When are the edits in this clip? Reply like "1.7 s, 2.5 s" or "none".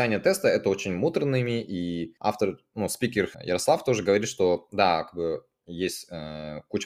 2.2 s, 3.3 s